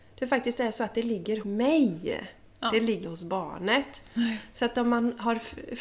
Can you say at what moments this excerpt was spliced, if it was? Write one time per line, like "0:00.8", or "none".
0:01.4
0:03.0